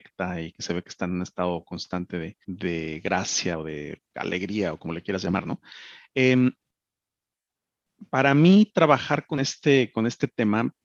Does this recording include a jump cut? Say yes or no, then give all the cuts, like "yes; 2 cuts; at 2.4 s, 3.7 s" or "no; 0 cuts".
yes; 2 cuts; at 2.4 s, 8.1 s